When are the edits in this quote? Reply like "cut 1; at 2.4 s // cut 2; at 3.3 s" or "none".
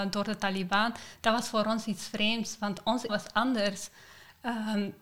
cut 1; at 3.1 s